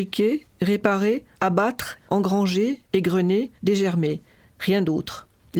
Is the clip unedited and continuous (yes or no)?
no